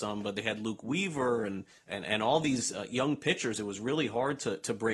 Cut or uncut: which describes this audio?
cut